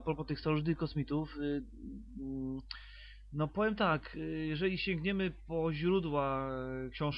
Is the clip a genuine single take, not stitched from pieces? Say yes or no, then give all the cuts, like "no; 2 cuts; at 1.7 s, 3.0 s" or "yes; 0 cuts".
yes; 0 cuts